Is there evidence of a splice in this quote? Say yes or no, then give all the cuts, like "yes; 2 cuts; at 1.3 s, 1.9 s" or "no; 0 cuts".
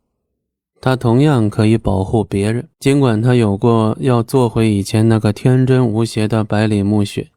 yes; 1 cut; at 2.7 s